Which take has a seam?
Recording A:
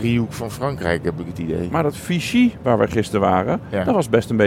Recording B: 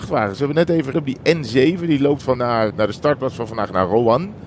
B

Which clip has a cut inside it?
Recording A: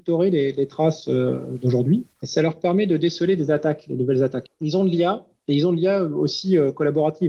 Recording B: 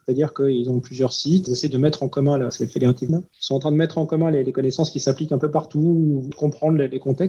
B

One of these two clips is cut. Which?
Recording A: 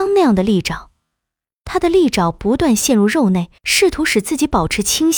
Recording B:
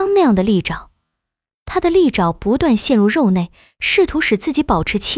A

